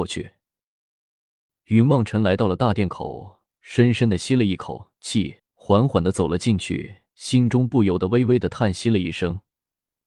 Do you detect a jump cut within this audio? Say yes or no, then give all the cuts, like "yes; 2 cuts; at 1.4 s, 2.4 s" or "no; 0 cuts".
yes; 2 cuts; at 5.4 s, 7.1 s